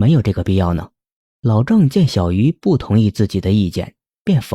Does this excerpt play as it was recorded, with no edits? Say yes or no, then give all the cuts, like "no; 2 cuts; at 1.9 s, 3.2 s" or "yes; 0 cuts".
no; 1 cut; at 1.2 s